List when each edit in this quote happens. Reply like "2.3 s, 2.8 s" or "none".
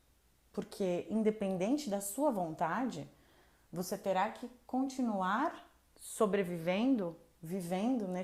none